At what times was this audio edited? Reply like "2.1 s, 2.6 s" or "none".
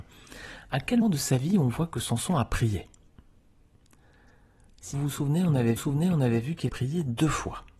1.0 s, 4.9 s, 5.8 s, 6.7 s